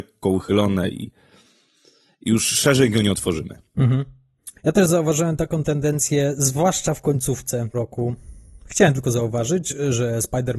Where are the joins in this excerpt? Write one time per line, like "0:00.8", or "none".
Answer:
0:04.6
0:07.7